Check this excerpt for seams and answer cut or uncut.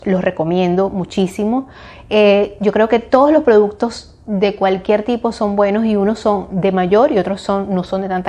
uncut